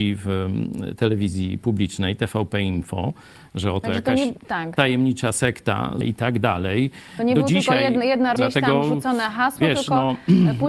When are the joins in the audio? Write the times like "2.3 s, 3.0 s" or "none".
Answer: 6.0 s, 8.4 s